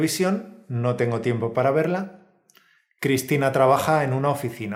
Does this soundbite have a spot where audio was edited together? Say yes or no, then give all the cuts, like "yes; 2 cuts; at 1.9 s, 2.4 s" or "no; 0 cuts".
no; 0 cuts